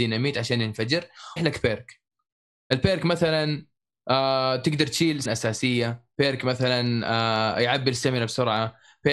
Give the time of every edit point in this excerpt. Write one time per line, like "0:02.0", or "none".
0:01.4
0:05.3